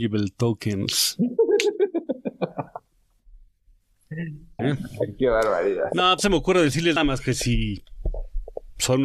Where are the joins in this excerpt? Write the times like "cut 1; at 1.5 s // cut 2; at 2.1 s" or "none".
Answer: cut 1; at 4.6 s // cut 2; at 6.2 s // cut 3; at 7.0 s